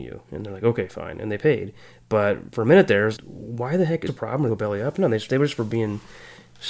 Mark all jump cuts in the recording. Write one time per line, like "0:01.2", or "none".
0:03.2
0:04.1
0:04.5